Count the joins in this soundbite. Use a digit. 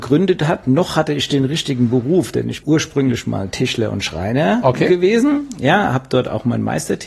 1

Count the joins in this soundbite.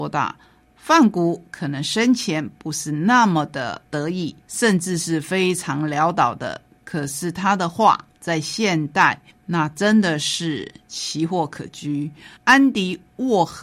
3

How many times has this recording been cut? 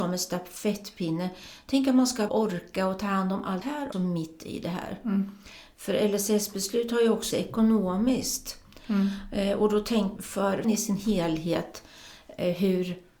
6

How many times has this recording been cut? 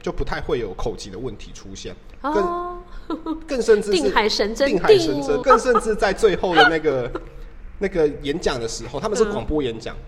1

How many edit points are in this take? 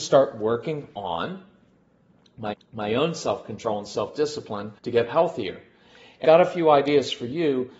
3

